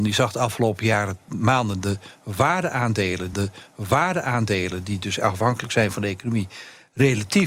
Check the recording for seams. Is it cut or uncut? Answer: cut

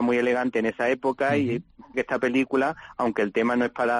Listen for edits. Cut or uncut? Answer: cut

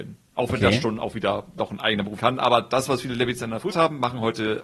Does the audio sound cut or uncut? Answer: cut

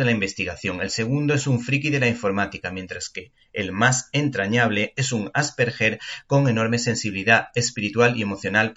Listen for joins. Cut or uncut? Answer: uncut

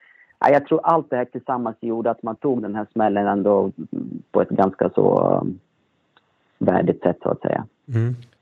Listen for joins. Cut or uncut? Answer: uncut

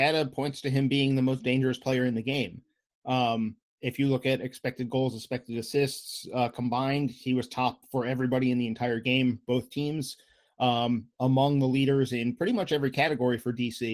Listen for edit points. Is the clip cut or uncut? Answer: uncut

